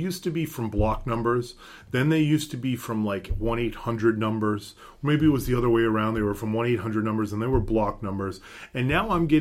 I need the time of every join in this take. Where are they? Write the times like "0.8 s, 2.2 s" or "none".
none